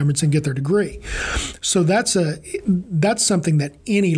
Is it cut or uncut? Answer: uncut